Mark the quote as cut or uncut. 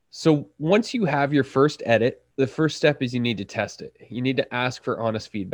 cut